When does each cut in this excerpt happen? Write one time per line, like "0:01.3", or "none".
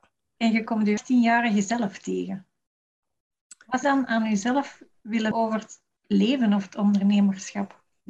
0:01.0
0:03.8
0:05.3